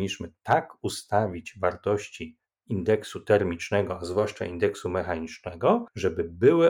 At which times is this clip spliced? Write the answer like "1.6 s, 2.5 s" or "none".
none